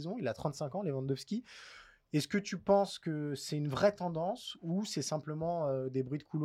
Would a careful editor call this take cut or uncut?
uncut